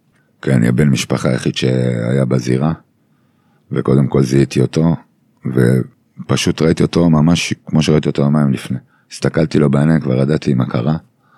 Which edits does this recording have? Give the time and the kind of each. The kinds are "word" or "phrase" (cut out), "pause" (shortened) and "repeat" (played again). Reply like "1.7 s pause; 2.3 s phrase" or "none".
none